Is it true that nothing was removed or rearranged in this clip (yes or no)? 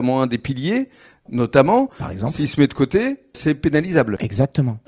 no